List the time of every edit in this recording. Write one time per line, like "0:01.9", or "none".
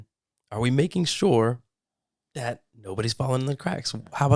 none